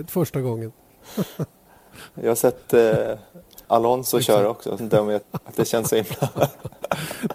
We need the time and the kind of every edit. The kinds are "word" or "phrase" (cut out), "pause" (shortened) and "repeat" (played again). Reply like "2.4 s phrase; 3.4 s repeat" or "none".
3.6 s pause; 4.8 s phrase; 5.2 s word